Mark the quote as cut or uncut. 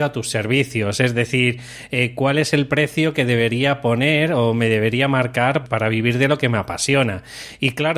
cut